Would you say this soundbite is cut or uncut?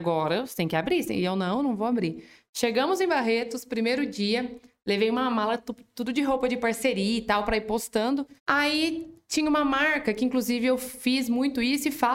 cut